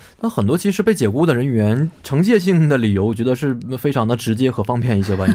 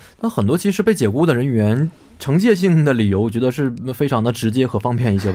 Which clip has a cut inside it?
first; 1 cut; at 2.0 s

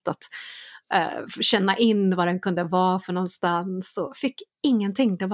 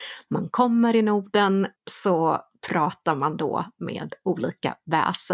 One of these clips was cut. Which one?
second; 1 cut; at 1.8 s

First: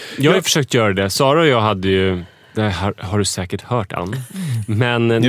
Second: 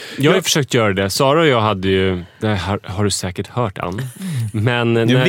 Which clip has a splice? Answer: second; 1 cut; at 2.3 s

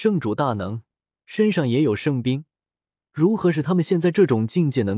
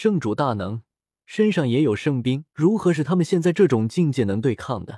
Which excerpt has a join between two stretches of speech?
second; 1 cut; at 2.5 s

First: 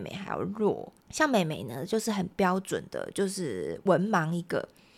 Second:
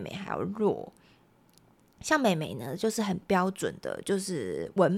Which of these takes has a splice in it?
first; 1 cut; at 1.0 s

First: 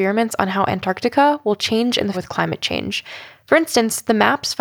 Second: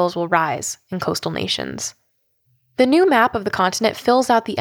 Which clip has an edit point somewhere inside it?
first; 1 cut; at 2.1 s

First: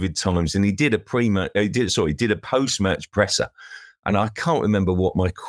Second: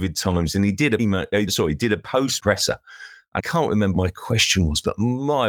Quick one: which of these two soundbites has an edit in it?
second; 5 cuts; at 1.0 s, 1.5 s, 2.4 s, 3.4 s, 3.9 s

